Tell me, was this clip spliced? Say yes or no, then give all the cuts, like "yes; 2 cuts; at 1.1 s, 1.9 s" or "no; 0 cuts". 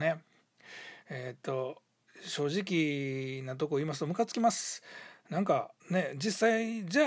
yes; 2 cuts; at 2.1 s, 5.8 s